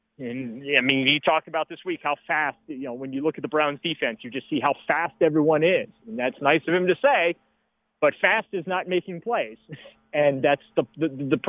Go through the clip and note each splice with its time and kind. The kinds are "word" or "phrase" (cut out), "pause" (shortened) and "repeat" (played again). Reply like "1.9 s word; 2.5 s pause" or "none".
none